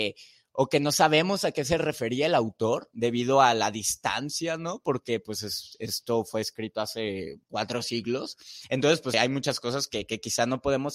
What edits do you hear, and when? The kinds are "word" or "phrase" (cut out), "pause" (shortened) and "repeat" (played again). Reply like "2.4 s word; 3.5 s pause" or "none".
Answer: 7.4 s pause; 9.1 s word